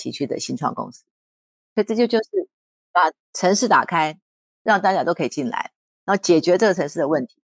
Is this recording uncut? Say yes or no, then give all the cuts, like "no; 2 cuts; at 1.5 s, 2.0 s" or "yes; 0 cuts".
yes; 0 cuts